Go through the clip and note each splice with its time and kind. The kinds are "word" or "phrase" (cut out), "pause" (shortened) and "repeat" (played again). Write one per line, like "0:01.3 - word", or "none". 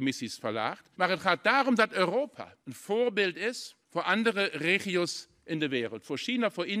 0:00.9 - pause
0:02.6 - pause
0:03.8 - pause